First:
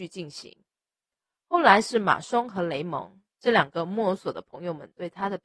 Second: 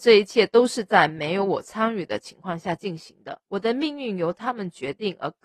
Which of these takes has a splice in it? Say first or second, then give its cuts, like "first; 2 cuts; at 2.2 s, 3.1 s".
second; 1 cut; at 3.4 s